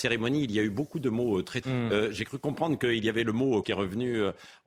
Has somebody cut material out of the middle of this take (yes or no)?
yes